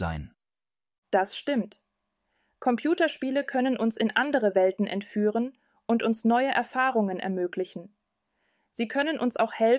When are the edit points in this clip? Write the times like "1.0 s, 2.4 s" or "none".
none